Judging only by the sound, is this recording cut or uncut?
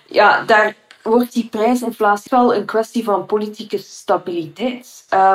cut